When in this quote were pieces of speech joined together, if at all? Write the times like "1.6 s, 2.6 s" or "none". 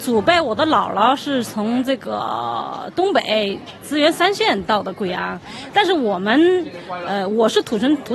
none